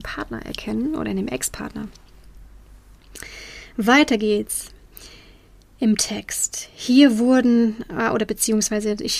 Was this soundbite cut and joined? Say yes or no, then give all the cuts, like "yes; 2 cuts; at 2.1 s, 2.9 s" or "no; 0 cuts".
no; 0 cuts